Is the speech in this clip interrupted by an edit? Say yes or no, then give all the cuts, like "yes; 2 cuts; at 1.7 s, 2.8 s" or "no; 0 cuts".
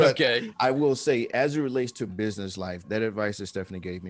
yes; 3 cuts; at 1.3 s, 2.1 s, 2.8 s